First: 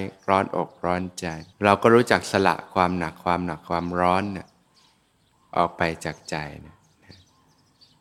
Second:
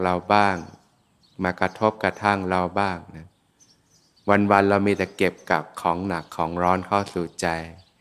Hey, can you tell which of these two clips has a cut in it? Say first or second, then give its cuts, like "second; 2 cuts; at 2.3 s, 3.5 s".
first; 1 cut; at 1.5 s